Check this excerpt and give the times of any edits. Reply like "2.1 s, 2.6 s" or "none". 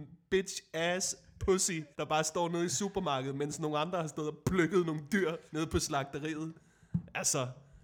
1.9 s, 5.5 s